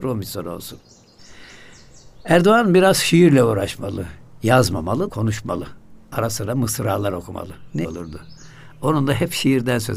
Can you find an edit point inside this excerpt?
yes; 2 cuts; at 5.1 s, 7.8 s

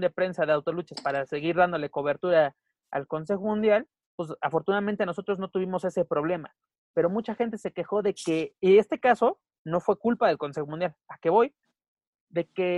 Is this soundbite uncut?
yes; 0 cuts

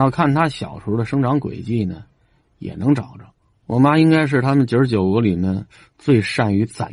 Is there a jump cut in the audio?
yes; 1 cut; at 3.4 s

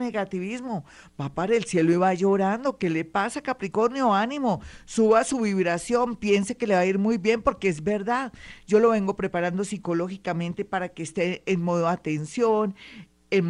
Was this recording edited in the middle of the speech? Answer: no; 0 cuts

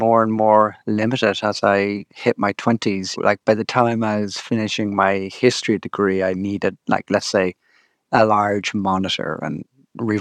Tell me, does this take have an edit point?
no; 0 cuts

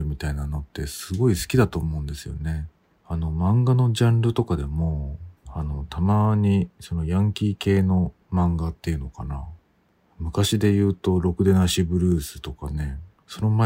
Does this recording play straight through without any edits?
no; 2 cuts; at 5.4 s, 8.2 s

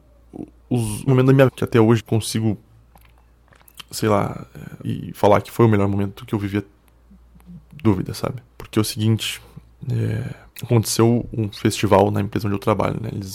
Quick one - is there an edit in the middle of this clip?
yes; 7 cuts; at 1.1 s, 1.5 s, 2.0 s, 4.8 s, 7.8 s, 8.5 s, 10.5 s

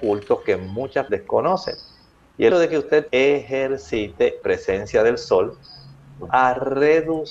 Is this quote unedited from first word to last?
no; 5 cuts; at 1.1 s, 2.5 s, 3.1 s, 4.4 s, 6.3 s

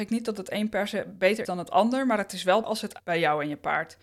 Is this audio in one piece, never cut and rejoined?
no; 3 cuts; at 1.4 s, 2.6 s, 3.0 s

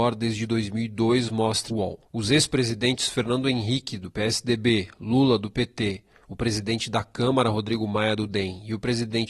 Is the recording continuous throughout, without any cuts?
no; 2 cuts; at 1.7 s, 2.1 s

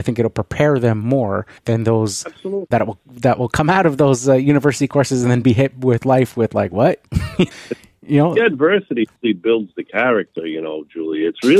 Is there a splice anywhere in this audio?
yes; 4 cuts; at 1.6 s, 2.7 s, 7.5 s, 9.2 s

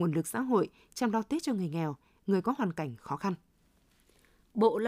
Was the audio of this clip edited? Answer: no; 0 cuts

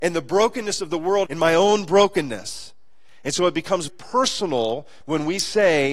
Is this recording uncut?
no; 2 cuts; at 1.3 s, 3.9 s

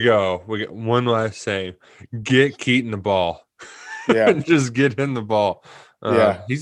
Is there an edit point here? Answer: no; 0 cuts

